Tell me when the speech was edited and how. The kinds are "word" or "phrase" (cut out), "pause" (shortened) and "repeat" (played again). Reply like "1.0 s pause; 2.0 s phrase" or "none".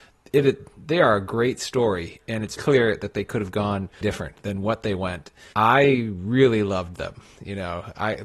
2.6 s word; 4.0 s word; 5.5 s word